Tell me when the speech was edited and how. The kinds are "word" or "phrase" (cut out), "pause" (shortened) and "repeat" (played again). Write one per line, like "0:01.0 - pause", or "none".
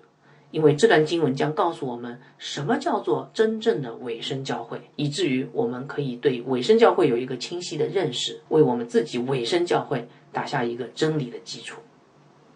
0:04.9 - pause
0:08.5 - pause